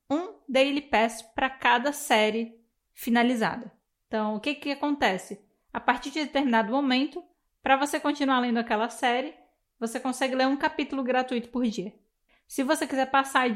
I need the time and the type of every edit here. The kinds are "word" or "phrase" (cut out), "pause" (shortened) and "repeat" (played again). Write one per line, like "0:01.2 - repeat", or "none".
none